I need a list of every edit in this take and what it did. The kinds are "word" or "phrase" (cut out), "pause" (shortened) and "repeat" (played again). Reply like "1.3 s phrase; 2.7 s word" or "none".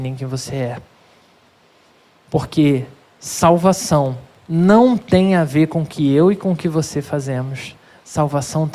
none